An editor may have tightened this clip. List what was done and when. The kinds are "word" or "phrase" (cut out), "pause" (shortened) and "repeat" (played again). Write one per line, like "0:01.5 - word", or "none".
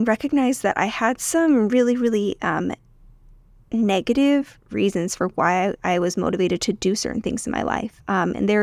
0:04.6 - pause